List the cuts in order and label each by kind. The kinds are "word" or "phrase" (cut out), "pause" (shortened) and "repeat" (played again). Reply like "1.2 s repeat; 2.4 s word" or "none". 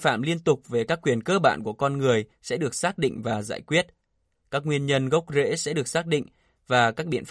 none